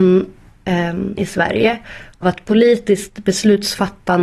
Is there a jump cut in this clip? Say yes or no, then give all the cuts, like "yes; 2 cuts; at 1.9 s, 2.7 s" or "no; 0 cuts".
yes; 2 cuts; at 1.2 s, 2.2 s